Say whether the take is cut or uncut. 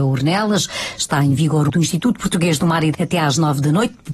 cut